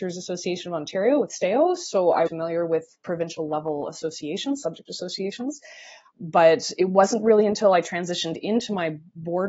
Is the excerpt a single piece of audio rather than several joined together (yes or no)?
no